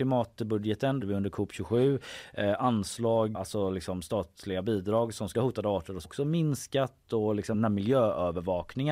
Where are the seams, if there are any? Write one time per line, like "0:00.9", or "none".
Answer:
0:01.0
0:03.3
0:05.3
0:06.0
0:07.5